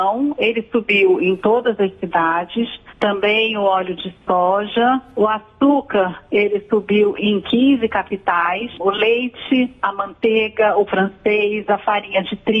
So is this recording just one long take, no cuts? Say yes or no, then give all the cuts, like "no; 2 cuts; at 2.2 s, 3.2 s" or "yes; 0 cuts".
no; 1 cut; at 10.9 s